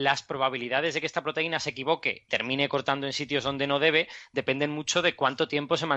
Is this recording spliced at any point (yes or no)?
yes